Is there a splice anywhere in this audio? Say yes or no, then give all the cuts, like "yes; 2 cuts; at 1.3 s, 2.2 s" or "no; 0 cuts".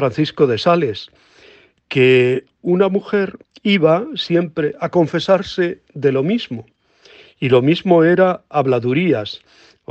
yes; 1 cut; at 3.4 s